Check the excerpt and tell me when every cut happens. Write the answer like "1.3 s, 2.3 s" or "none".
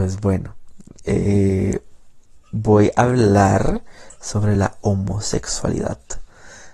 none